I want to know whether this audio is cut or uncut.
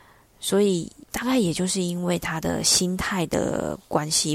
cut